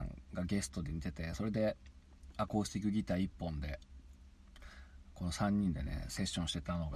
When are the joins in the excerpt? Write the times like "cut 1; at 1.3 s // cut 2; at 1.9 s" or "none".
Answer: none

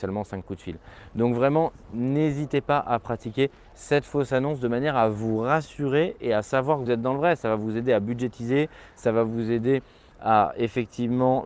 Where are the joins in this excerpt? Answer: cut 1; at 6.9 s

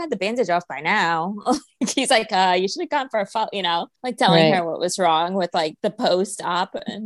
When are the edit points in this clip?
cut 1; at 4.0 s // cut 2; at 5.8 s

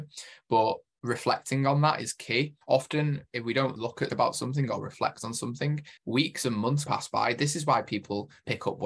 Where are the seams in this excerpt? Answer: cut 1; at 2.6 s // cut 2; at 3.8 s // cut 3; at 4.1 s // cut 4; at 6.0 s // cut 5; at 6.9 s

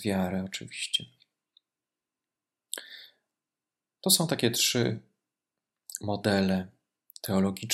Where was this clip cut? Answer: none

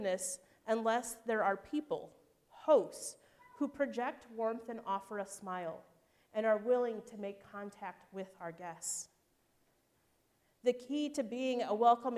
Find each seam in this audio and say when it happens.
none

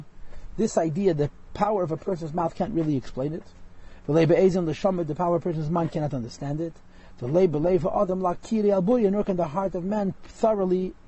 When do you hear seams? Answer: none

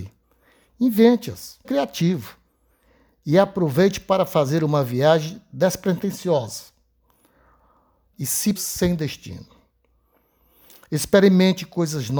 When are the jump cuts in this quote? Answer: cut 1; at 1.6 s // cut 2; at 8.1 s // cut 3; at 8.6 s

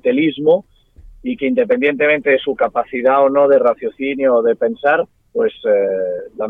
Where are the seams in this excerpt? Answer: cut 1; at 5.2 s

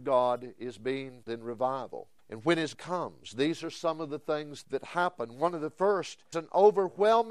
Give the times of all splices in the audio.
cut 1; at 1.3 s // cut 2; at 2.2 s // cut 3; at 2.7 s // cut 4; at 6.3 s

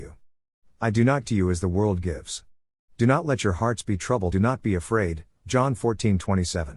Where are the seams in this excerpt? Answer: cut 1; at 1.2 s // cut 2; at 4.3 s

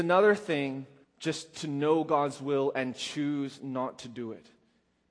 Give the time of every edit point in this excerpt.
cut 1; at 1.0 s

